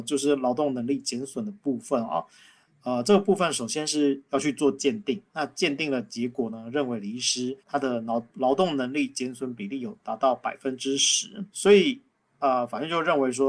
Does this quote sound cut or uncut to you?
cut